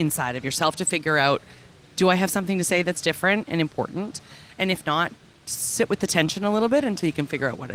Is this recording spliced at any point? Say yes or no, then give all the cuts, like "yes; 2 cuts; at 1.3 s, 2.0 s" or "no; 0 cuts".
no; 0 cuts